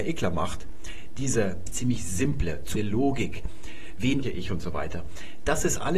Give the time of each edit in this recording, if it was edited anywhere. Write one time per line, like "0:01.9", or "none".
0:01.7
0:02.8
0:04.2